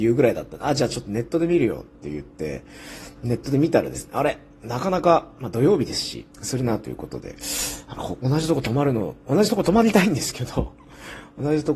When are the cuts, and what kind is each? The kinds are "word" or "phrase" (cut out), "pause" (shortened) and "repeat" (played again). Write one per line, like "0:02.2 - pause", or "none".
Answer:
0:06.3 - pause